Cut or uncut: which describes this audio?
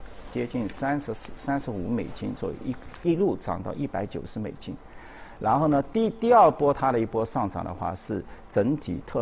uncut